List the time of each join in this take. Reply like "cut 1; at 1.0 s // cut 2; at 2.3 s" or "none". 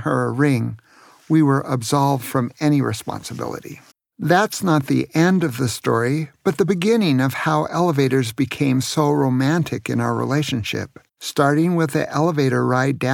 cut 1; at 3.9 s // cut 2; at 11.1 s